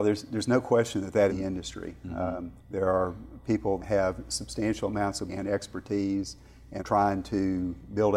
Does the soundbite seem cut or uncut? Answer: cut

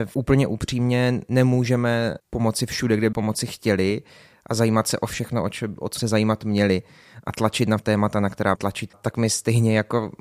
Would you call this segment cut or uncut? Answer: cut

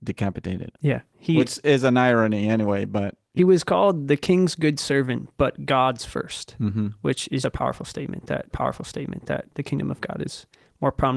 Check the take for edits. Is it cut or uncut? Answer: cut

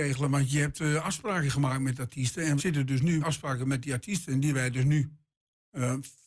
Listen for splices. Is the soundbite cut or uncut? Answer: cut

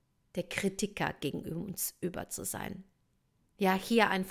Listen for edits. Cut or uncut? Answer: uncut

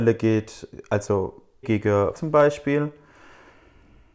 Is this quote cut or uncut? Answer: cut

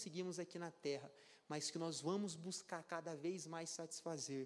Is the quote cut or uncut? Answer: uncut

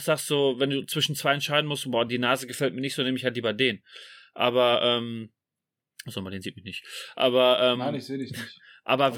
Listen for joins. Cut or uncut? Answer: uncut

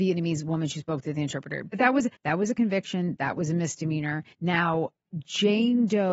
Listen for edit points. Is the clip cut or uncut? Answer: cut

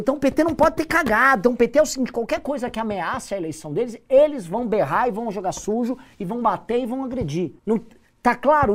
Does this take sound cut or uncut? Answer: cut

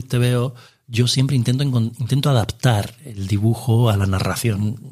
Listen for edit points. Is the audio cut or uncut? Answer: uncut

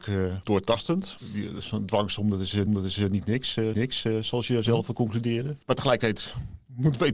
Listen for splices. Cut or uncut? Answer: cut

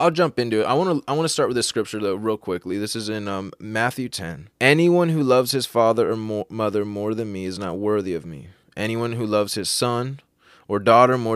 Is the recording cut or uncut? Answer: cut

